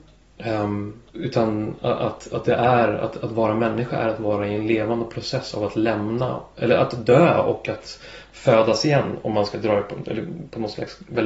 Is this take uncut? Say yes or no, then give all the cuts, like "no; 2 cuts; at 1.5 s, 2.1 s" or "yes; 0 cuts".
no; 1 cut; at 1.1 s